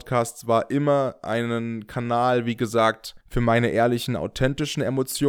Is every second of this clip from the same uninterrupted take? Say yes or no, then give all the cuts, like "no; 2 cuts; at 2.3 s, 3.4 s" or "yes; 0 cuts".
no; 1 cut; at 3.2 s